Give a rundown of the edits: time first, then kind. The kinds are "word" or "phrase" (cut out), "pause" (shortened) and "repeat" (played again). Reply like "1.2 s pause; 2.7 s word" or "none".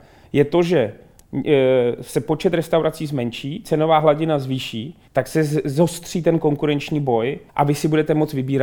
5.1 s pause; 7.5 s pause